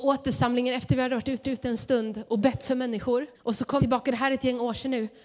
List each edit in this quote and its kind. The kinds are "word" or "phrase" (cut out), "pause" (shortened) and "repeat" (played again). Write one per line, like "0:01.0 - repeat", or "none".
0:01.4 - repeat
0:03.3 - pause
0:03.8 - word